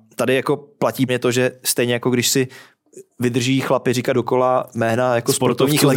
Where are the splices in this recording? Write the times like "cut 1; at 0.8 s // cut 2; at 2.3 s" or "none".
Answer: cut 1; at 1.1 s // cut 2; at 4.1 s